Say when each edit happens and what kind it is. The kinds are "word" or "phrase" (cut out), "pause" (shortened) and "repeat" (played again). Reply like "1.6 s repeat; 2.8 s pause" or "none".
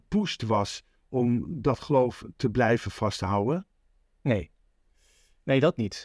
none